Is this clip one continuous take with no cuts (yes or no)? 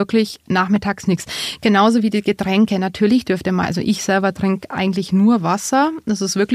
yes